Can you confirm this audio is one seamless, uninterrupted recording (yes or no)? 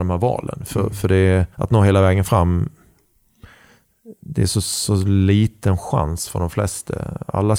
no